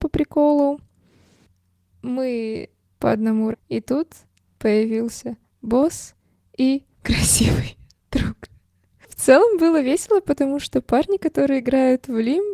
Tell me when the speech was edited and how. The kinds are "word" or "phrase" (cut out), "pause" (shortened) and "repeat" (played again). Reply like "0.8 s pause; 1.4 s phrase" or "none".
2.9 s word; 3.5 s word; 4.4 s word; 5.5 s word; 6.9 s word